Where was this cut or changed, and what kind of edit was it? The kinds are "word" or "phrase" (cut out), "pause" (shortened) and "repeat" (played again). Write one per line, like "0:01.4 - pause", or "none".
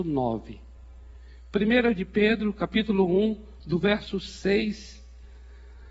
0:03.6 - pause